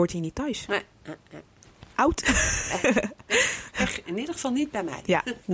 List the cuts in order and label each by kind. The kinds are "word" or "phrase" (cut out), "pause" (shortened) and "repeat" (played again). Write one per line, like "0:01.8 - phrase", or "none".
none